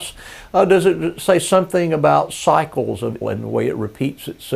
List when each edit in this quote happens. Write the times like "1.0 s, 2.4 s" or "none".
3.2 s